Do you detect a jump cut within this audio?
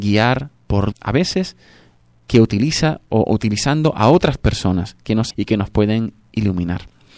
yes; 2 cuts; at 0.9 s, 5.3 s

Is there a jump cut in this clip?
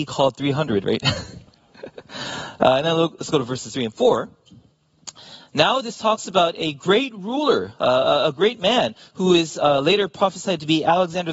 no; 0 cuts

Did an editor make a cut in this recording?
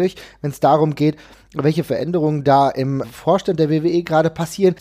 yes; 1 cut; at 3.0 s

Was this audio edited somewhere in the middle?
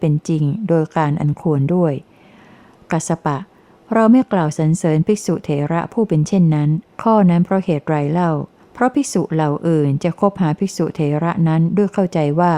yes; 2 cuts; at 6.9 s, 8.6 s

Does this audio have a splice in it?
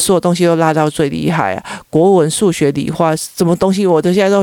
no; 0 cuts

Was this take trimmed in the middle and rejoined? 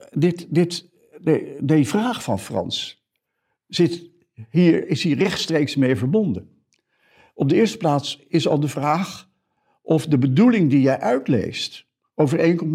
no; 0 cuts

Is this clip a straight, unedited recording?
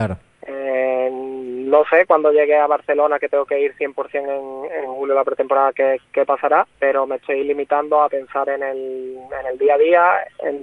no; 1 cut; at 6.7 s

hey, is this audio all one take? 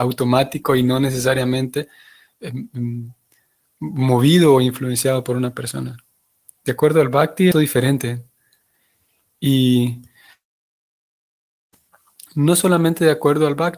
no; 1 cut; at 7.5 s

